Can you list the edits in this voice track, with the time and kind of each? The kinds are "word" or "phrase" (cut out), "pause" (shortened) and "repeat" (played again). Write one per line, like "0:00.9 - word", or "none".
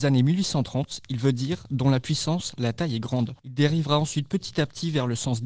0:03.4 - pause